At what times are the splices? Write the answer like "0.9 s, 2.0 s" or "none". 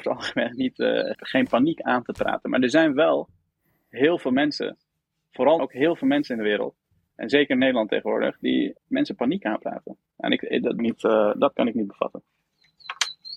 1.1 s, 5.6 s, 8.8 s, 10.8 s